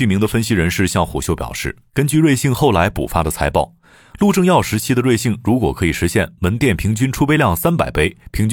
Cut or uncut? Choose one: uncut